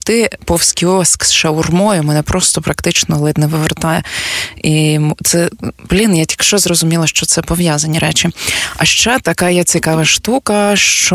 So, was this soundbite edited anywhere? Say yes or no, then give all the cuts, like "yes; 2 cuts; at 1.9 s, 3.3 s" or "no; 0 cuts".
no; 0 cuts